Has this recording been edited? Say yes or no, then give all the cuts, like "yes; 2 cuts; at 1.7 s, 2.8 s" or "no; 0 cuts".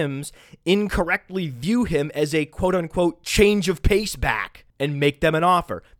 no; 0 cuts